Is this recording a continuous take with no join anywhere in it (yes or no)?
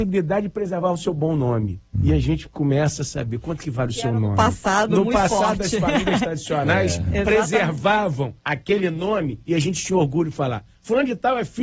no